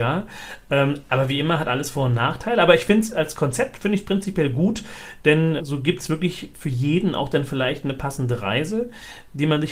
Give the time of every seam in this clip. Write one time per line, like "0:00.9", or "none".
0:05.6